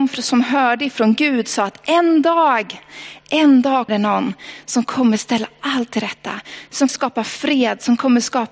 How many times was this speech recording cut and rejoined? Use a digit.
2